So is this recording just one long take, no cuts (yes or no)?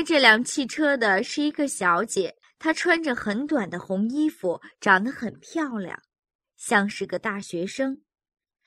no